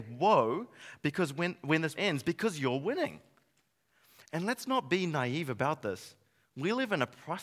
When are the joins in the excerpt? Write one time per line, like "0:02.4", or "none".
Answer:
0:02.0